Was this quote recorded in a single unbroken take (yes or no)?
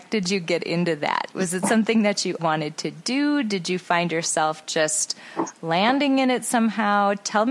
no